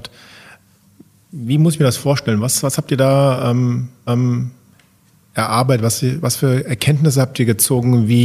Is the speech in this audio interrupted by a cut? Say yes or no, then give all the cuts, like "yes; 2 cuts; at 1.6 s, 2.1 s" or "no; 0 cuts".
yes; 1 cut; at 4.1 s